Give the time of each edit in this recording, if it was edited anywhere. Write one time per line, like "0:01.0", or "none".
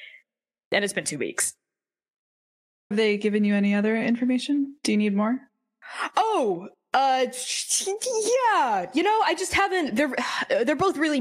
0:02.9